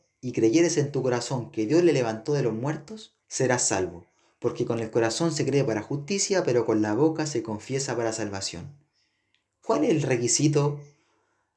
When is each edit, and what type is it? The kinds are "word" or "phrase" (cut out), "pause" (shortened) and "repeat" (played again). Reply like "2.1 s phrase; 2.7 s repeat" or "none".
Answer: 3.2 s pause